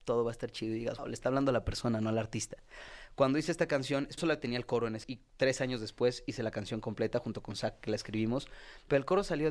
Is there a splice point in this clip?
yes; 3 cuts; at 1.0 s, 4.2 s, 5.0 s

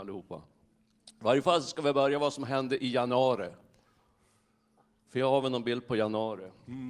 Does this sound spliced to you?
no; 0 cuts

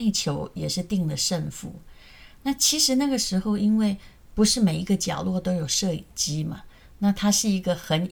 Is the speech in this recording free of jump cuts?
yes; 0 cuts

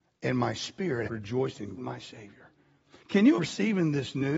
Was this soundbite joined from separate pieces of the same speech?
yes; 3 cuts; at 1.1 s, 1.8 s, 3.4 s

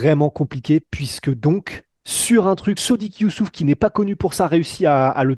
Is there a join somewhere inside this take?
yes; 2 cuts; at 1.9 s, 2.8 s

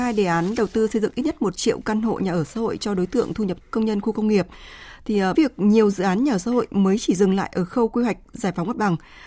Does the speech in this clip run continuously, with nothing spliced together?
no; 2 cuts; at 3.6 s, 5.3 s

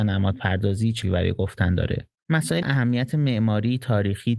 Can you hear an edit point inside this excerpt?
yes; 2 cuts; at 1.0 s, 2.6 s

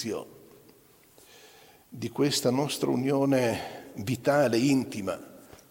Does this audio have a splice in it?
no; 0 cuts

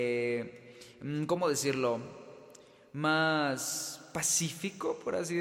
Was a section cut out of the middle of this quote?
no; 0 cuts

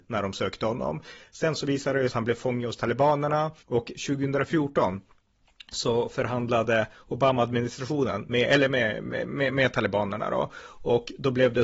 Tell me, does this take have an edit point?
yes; 2 cuts; at 2.1 s, 3.6 s

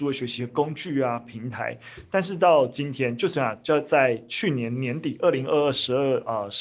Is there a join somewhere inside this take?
no; 0 cuts

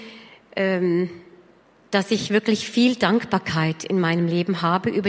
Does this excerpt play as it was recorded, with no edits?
yes; 0 cuts

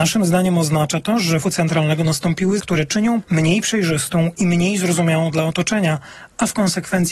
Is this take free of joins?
no; 3 cuts; at 1.4 s, 2.6 s, 3.2 s

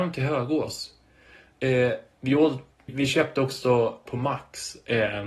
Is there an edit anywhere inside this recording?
yes; 2 cuts; at 2.9 s, 4.1 s

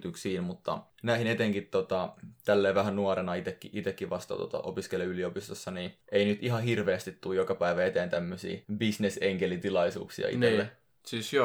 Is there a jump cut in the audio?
yes; 2 cuts; at 6.0 s, 8.6 s

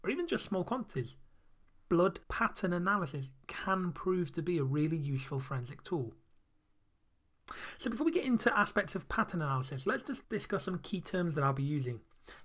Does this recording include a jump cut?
yes; 2 cuts; at 2.2 s, 10.2 s

